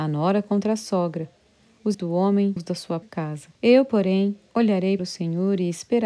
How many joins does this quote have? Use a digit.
5